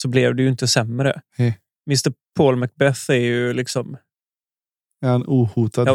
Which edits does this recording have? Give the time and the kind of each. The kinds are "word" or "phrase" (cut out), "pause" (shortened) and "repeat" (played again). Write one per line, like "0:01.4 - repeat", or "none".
0:01.8 - pause